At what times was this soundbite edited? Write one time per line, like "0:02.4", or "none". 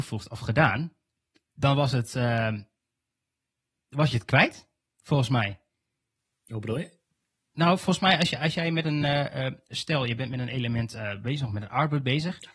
none